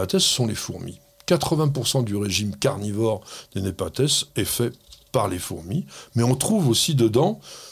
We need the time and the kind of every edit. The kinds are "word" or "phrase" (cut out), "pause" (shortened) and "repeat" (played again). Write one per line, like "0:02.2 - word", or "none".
none